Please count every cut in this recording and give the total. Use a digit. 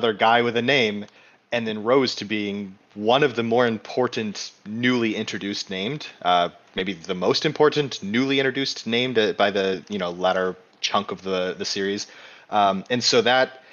0